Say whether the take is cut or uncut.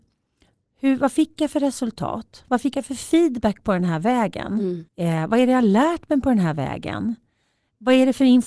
cut